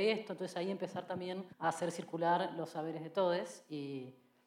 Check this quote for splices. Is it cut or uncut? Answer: cut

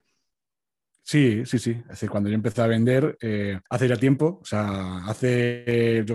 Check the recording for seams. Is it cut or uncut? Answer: cut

